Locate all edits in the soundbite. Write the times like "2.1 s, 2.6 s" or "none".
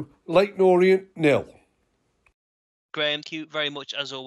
3.2 s